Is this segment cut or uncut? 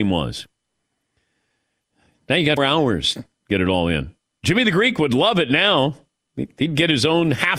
cut